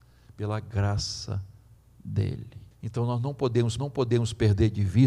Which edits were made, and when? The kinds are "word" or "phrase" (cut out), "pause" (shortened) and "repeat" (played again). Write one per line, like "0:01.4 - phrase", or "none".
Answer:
0:02.7 - pause
0:03.8 - repeat